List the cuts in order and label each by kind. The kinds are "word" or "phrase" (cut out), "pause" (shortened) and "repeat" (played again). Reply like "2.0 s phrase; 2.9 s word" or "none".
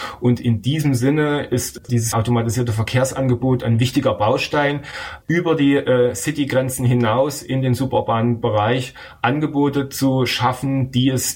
5.2 s pause